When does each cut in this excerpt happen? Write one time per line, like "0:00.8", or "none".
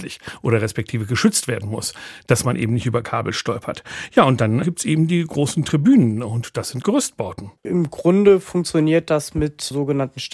0:04.6
0:06.8
0:07.6

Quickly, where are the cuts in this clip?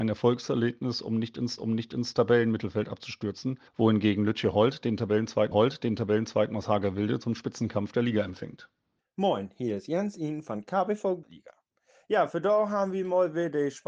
0:01.6
0:03.7
0:05.5
0:09.0
0:11.2

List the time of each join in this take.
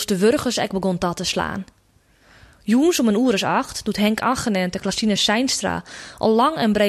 none

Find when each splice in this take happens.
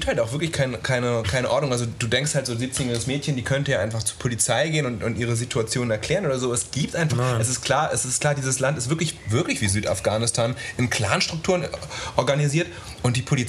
none

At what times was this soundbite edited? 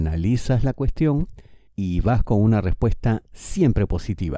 0:01.7

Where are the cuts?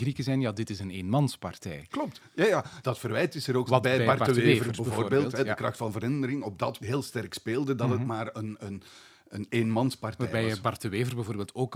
0:02.8
0:03.7
0:06.8

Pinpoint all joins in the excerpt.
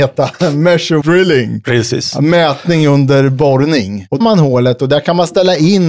0:01.0
0:04.2

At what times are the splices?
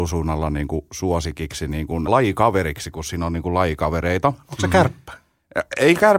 0:02.1

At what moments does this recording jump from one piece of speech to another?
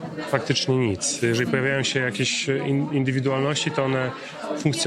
none

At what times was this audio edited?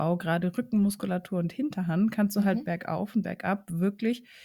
none

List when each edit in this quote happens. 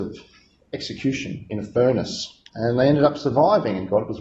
0:02.5

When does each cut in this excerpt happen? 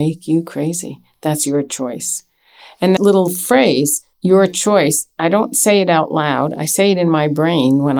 0:03.0
0:04.1

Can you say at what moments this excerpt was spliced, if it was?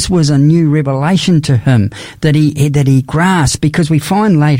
none

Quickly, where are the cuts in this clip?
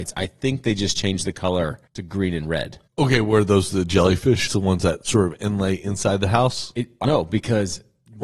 0:01.9
0:02.9
0:04.5
0:07.0

